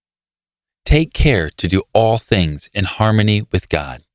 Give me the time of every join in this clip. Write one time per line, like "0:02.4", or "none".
none